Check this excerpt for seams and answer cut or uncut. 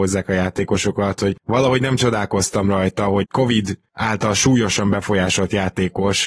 cut